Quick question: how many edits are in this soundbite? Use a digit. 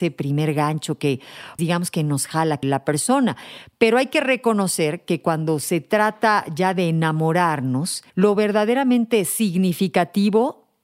3